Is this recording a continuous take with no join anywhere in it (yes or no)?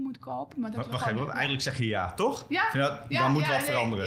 yes